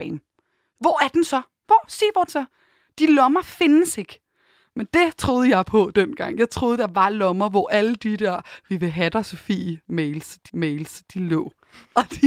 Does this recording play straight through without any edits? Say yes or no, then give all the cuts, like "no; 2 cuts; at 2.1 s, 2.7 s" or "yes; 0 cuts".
no; 2 cuts; at 2.3 s, 10.5 s